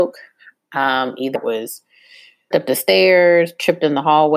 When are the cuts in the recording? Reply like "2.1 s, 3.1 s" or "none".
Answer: 1.3 s, 2.5 s